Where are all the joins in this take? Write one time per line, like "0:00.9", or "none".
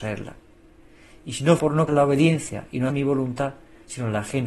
0:01.6
0:01.9
0:02.9